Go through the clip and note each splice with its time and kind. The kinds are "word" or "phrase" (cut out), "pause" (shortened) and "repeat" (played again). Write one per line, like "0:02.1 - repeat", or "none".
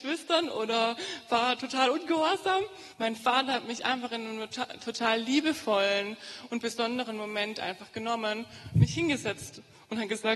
0:02.9 - pause